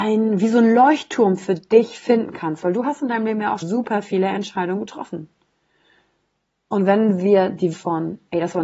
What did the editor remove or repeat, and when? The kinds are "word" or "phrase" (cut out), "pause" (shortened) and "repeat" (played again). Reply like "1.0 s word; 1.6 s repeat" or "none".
3.6 s word; 7.7 s word

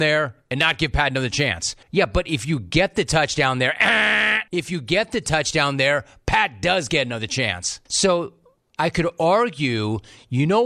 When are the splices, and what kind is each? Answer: 1.8 s pause; 4.5 s pause; 7.9 s pause

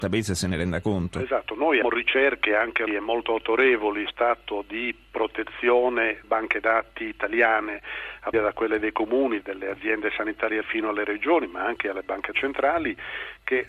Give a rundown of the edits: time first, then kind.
1.8 s word; 2.9 s word; 4.1 s word; 6.2 s word; 8.3 s word; 9.4 s word; 10.6 s word; 12.3 s word

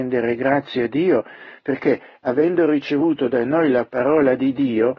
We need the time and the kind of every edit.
none

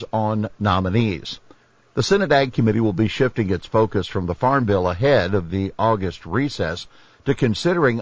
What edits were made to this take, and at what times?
none

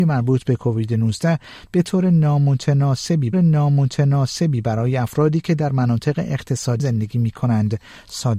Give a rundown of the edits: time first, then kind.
3.3 s repeat; 6.8 s phrase

